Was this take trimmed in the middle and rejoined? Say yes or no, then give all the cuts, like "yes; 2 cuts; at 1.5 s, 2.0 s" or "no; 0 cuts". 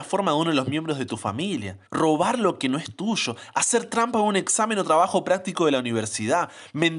yes; 1 cut; at 1.9 s